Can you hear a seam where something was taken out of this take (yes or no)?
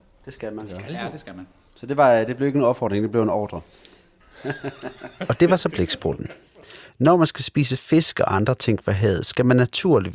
no